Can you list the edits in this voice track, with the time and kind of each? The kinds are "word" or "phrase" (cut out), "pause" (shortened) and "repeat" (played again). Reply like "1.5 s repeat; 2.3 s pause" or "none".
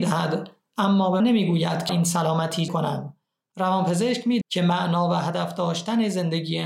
1.2 s word; 1.9 s word; 2.7 s word; 4.4 s word